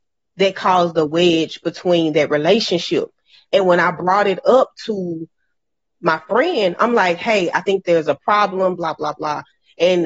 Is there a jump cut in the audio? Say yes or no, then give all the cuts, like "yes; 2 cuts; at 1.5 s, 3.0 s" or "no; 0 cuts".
no; 0 cuts